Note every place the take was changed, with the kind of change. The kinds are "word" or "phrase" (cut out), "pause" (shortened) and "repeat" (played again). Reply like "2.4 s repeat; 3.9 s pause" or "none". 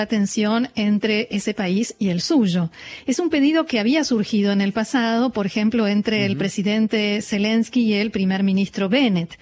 none